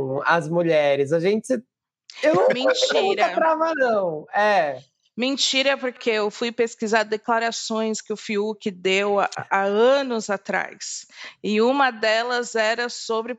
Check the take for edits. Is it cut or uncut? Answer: cut